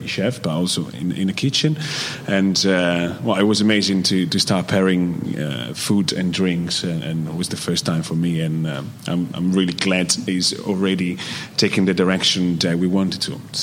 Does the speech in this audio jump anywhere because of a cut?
no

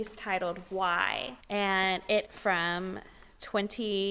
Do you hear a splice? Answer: yes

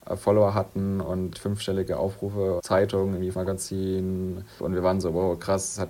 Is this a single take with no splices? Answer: no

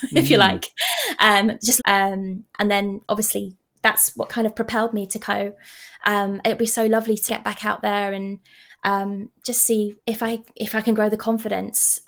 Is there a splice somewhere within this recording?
yes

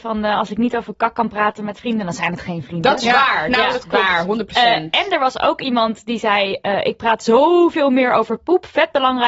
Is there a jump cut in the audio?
no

